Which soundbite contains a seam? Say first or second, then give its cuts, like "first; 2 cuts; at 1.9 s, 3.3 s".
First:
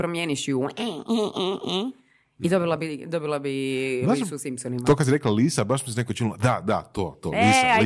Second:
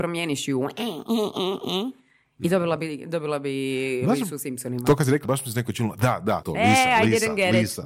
second; 2 cuts; at 5.2 s, 6.4 s